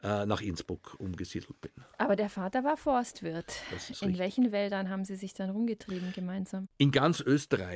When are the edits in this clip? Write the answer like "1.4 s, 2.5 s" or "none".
none